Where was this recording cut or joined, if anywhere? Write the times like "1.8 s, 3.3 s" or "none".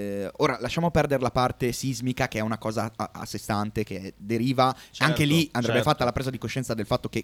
none